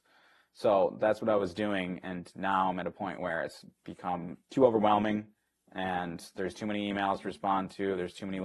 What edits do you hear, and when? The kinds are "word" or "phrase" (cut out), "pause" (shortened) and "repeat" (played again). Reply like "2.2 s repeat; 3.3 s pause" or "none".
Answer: none